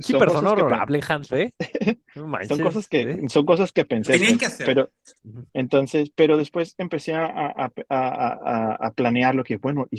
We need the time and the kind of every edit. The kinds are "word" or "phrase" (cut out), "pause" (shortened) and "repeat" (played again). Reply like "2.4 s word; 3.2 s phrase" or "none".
5.5 s pause